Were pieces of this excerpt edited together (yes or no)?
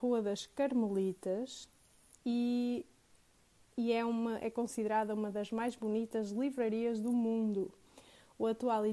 yes